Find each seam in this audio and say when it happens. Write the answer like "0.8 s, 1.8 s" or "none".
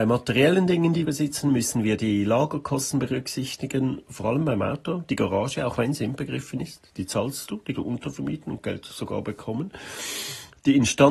1.0 s, 7.7 s